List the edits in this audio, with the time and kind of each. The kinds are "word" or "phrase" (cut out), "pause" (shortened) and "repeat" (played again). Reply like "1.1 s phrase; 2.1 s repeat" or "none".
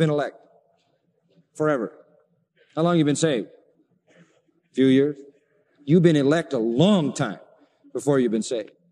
3.7 s pause

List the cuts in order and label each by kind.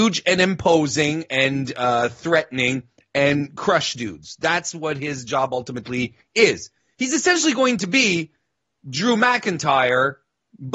none

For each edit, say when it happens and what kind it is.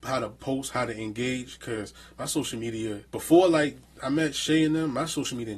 3.1 s pause

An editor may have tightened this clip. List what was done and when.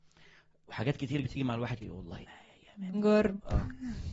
1.2 s word; 1.8 s word; 2.2 s word; 2.9 s word

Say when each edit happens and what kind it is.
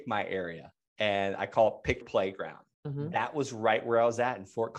2.0 s word; 2.7 s pause

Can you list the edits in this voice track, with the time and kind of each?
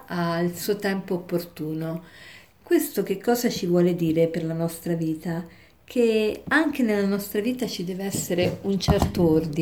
none

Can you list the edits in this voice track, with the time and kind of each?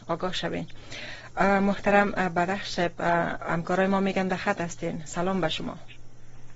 none

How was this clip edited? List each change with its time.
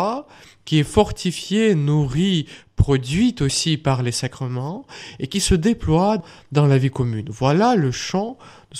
none

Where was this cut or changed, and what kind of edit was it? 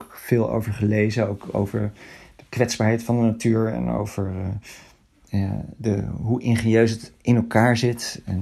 5.8 s word

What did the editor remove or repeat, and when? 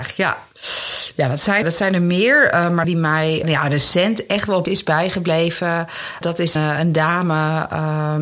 1.6 s word; 2.8 s word; 3.4 s word; 4.7 s word; 6.2 s word; 6.6 s word

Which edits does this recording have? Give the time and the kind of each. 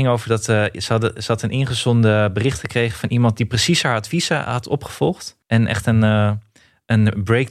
5.4 s pause

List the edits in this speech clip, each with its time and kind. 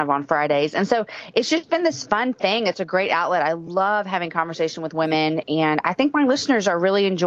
none

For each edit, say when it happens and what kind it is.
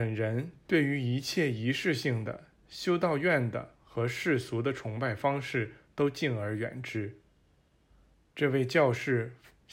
none

